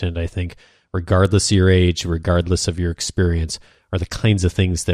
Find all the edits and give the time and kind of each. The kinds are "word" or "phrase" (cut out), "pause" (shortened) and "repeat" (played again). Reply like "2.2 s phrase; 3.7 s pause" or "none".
none

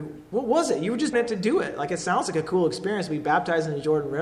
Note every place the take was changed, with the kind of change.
1.1 s word

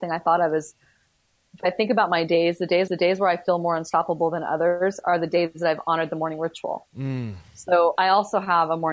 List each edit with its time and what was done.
2.9 s repeat; 8.0 s word

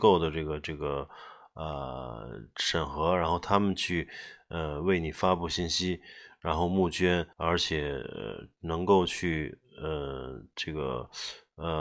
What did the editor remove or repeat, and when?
7.3 s pause

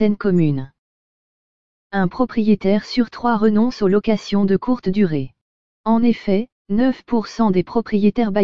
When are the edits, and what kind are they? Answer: none

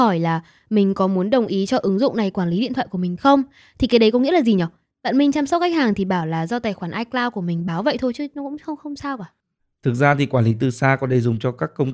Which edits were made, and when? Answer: none

